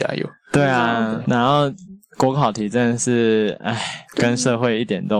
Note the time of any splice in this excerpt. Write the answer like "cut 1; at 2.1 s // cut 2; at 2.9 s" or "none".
cut 1; at 1.2 s // cut 2; at 4.1 s